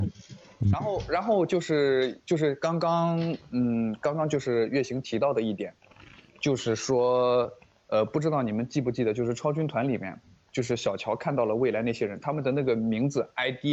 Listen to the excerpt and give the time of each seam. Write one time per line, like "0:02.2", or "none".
none